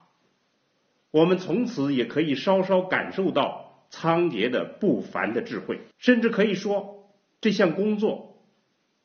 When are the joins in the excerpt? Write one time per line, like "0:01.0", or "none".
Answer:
0:05.9